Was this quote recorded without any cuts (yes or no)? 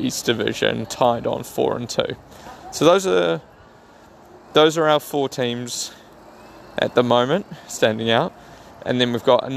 yes